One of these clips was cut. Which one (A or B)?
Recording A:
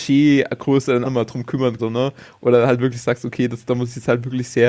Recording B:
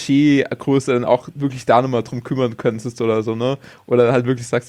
A